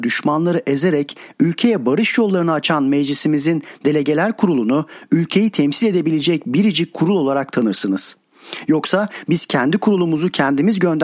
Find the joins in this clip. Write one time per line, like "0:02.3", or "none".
none